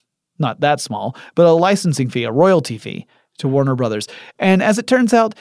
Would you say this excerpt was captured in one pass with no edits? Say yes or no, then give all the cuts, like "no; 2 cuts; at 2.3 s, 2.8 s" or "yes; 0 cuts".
yes; 0 cuts